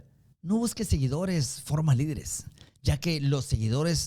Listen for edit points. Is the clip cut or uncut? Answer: uncut